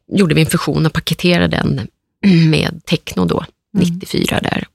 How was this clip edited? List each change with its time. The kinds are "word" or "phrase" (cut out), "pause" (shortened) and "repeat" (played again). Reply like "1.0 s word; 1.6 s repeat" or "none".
none